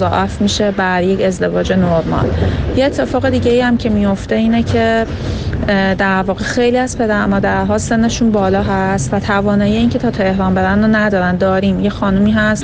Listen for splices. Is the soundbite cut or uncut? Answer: uncut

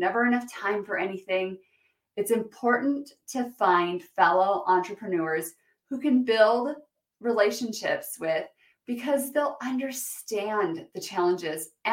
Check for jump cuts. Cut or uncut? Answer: uncut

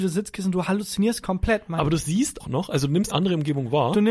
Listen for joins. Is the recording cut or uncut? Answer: cut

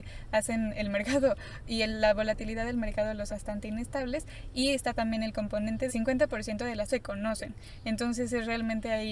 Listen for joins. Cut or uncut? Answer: cut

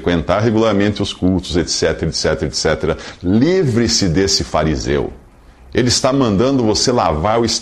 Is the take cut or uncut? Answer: uncut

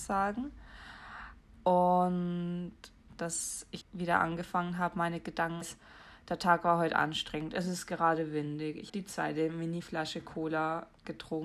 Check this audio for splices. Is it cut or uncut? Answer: cut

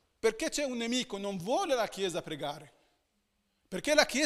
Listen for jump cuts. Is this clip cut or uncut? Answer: uncut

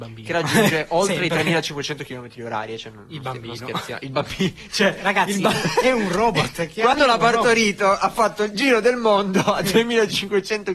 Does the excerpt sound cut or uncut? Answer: uncut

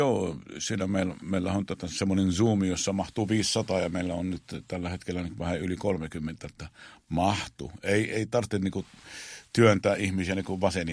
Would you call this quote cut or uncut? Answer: uncut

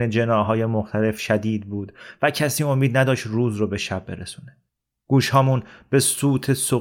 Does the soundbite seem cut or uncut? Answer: uncut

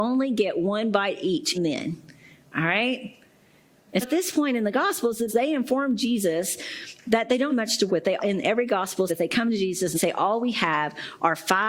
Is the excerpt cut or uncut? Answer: cut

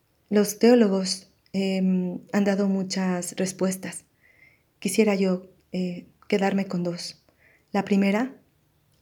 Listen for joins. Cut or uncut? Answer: uncut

